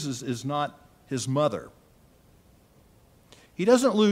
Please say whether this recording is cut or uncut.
uncut